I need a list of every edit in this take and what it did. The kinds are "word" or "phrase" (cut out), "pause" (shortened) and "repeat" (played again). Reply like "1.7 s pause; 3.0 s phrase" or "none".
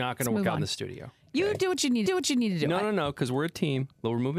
2.1 s repeat